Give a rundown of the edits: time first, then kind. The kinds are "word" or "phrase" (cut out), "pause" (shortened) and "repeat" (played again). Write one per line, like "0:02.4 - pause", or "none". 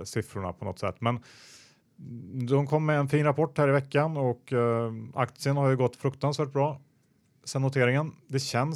none